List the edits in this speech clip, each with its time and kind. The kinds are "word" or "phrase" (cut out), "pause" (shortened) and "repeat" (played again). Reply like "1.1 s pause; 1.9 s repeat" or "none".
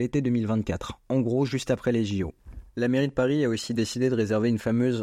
none